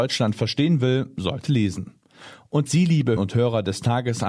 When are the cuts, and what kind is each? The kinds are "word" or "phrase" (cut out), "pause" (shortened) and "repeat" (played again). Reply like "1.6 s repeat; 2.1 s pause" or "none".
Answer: 1.5 s word; 2.7 s word; 3.2 s word